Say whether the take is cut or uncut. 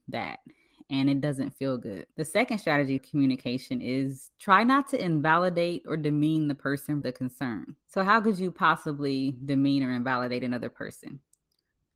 cut